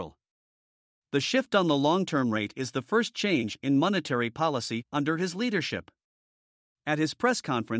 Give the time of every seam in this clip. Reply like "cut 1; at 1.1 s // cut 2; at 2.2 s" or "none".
none